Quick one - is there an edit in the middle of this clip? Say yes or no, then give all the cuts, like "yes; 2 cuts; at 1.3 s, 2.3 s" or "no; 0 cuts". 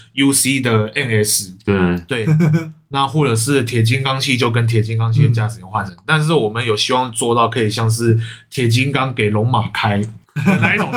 no; 0 cuts